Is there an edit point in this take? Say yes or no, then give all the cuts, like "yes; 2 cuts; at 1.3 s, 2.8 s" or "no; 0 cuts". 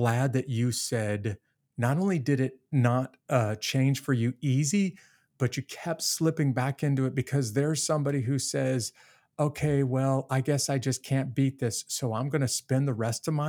no; 0 cuts